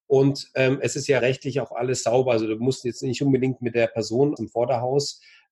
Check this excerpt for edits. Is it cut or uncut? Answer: cut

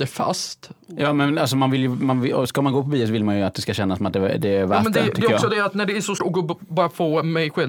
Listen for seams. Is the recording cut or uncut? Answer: cut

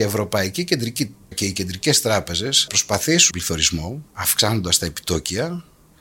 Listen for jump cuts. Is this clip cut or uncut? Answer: cut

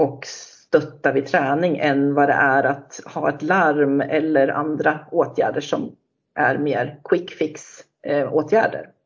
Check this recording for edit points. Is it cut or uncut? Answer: uncut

